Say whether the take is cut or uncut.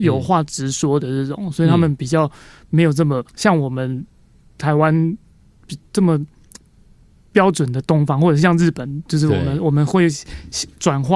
cut